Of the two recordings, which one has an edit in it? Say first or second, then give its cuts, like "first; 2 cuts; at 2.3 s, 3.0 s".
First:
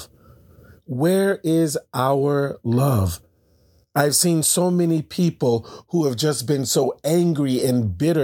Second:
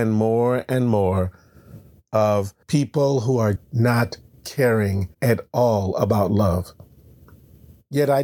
second; 3 cuts; at 2.6 s, 3.6 s, 5.1 s